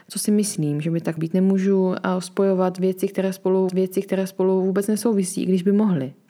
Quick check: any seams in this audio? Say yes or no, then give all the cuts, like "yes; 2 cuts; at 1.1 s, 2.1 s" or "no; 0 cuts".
yes; 2 cuts; at 1.2 s, 3.7 s